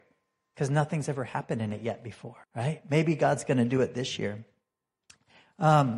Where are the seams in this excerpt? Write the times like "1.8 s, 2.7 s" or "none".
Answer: 2.4 s